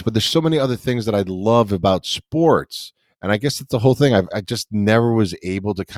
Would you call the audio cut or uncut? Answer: cut